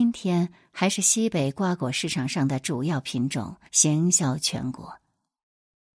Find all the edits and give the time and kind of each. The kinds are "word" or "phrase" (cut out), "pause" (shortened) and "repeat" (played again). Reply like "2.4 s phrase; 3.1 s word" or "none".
3.7 s pause